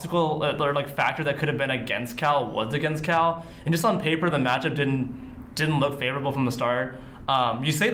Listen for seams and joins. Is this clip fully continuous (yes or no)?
yes